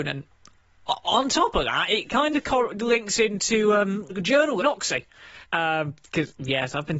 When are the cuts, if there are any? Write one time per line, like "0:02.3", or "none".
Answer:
0:04.1
0:04.6
0:05.4